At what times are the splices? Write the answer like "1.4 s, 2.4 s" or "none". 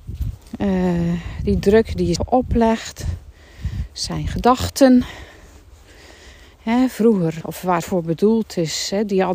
2.2 s, 7.4 s, 7.8 s